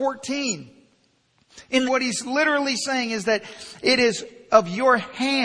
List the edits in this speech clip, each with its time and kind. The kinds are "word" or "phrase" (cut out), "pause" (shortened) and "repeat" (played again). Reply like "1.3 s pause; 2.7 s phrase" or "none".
1.8 s phrase

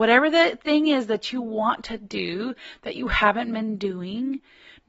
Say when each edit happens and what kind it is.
none

